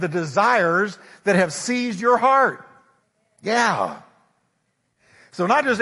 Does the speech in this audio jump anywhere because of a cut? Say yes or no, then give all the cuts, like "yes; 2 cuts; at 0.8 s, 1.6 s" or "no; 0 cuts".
yes; 1 cut; at 3.0 s